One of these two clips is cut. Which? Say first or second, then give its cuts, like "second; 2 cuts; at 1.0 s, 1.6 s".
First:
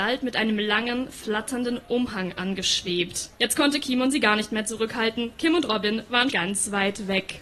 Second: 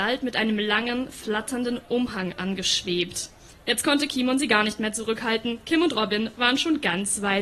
first; 2 cuts; at 3.3 s, 6.3 s